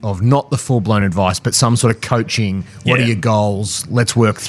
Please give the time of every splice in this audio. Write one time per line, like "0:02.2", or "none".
none